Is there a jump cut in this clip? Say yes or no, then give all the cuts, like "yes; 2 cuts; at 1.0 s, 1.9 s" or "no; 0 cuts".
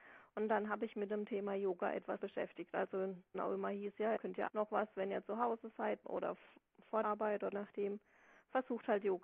yes; 8 cuts; at 0.9 s, 2.2 s, 3.3 s, 4.2 s, 4.5 s, 6.0 s, 7.0 s, 7.5 s